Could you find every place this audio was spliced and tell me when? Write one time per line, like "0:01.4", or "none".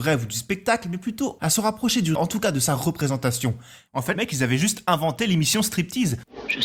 0:02.1
0:04.1